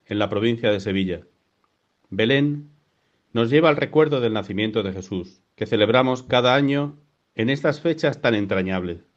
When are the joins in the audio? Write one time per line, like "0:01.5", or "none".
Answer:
0:05.5